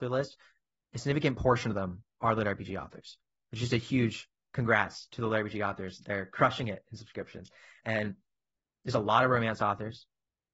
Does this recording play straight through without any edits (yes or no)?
yes